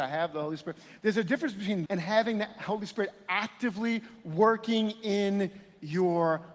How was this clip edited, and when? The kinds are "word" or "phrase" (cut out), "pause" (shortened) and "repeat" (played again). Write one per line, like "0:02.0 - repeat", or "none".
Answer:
0:01.9 - word